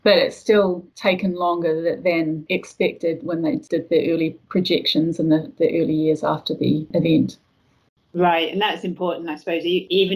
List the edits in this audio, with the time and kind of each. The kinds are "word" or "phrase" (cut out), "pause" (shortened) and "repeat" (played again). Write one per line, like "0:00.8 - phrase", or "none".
none